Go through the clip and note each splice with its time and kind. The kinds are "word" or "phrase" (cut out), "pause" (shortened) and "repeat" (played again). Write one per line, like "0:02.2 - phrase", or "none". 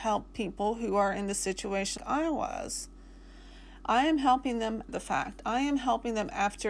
0:02.0 - word
0:04.9 - word